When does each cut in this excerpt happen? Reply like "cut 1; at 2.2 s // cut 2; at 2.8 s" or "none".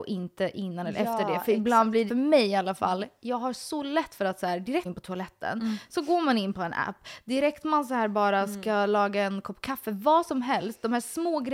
cut 1; at 2.1 s // cut 2; at 4.9 s